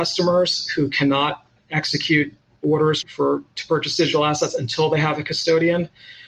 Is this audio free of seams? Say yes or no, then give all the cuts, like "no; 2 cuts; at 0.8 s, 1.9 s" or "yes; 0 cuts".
no; 1 cut; at 3.0 s